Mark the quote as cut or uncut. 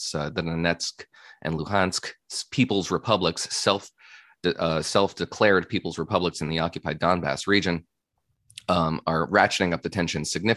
uncut